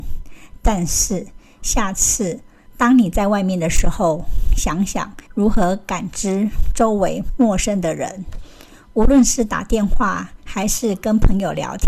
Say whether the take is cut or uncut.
cut